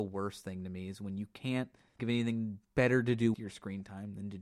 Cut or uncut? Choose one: cut